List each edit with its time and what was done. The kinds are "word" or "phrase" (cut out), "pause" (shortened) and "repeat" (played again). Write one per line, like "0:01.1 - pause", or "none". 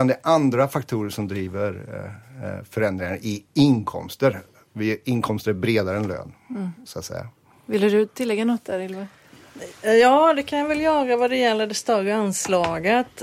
none